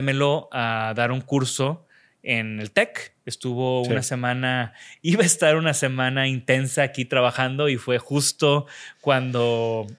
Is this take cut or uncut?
uncut